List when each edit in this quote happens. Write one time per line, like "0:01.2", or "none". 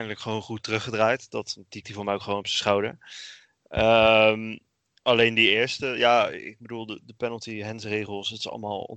0:01.8